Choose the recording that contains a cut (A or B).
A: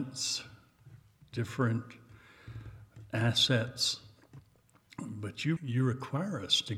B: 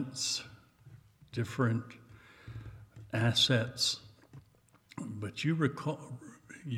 A